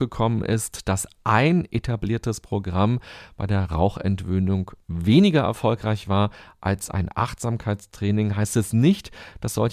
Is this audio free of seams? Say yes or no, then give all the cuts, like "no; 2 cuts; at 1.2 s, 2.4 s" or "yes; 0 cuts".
yes; 0 cuts